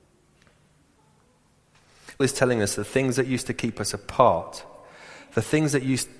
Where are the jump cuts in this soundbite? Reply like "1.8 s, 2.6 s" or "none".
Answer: 2.2 s